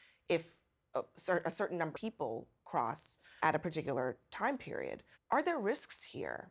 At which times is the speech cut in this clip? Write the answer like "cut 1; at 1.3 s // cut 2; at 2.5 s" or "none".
cut 1; at 0.9 s // cut 2; at 1.9 s // cut 3; at 3.4 s // cut 4; at 5.1 s

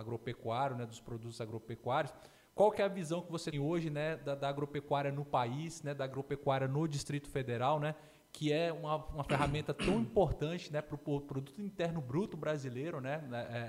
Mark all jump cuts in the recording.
cut 1; at 3.5 s

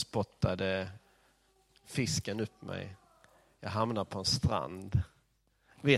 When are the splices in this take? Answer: none

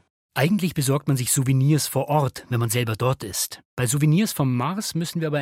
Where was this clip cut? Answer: cut 1; at 3.7 s

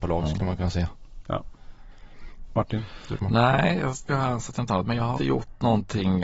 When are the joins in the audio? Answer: cut 1; at 4.1 s // cut 2; at 4.7 s // cut 3; at 5.2 s

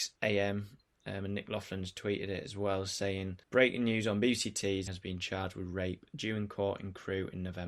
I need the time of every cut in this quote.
cut 1; at 3.4 s // cut 2; at 4.9 s

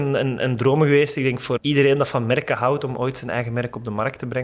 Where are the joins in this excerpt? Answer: cut 1; at 1.6 s

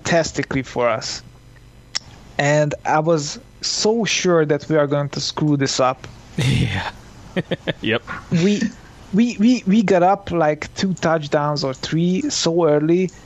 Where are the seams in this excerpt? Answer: none

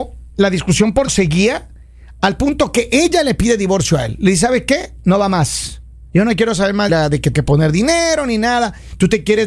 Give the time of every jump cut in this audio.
cut 1; at 1.1 s // cut 2; at 6.1 s // cut 3; at 6.9 s // cut 4; at 7.3 s

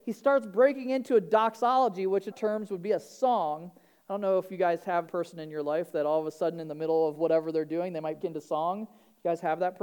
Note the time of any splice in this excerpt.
cut 1; at 2.3 s // cut 2; at 5.1 s // cut 3; at 8.2 s

